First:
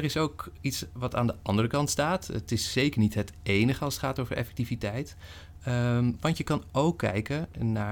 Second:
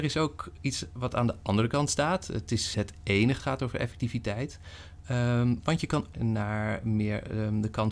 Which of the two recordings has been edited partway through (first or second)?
second